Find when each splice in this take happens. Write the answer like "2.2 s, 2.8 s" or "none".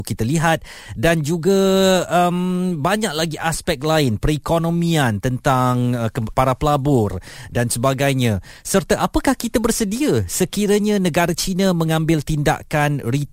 6.3 s